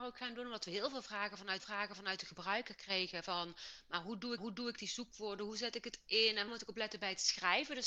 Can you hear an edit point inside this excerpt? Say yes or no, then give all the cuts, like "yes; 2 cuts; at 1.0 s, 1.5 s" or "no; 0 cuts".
yes; 3 cuts; at 1.6 s, 4.4 s, 6.5 s